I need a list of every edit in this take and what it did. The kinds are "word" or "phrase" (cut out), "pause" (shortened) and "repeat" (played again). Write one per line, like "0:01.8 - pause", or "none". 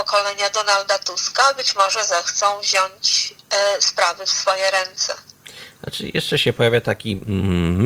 none